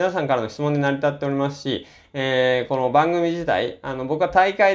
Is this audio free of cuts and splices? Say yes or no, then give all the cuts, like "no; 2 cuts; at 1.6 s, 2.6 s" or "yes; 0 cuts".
yes; 0 cuts